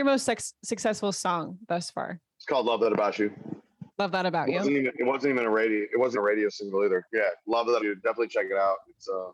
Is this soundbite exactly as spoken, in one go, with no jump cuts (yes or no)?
no